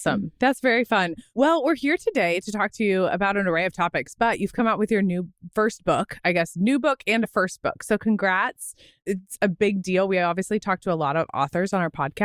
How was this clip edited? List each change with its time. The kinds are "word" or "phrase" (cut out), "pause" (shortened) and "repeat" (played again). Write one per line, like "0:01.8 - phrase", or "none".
none